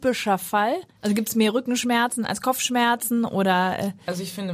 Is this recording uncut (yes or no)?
no